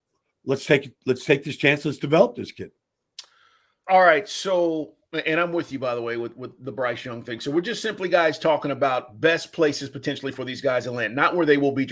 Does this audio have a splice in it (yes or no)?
no